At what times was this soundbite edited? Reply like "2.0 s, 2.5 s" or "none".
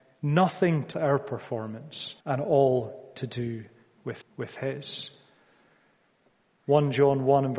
0.9 s, 2.2 s, 4.2 s